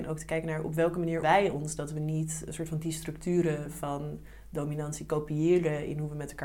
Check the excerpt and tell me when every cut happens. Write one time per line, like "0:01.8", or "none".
0:01.2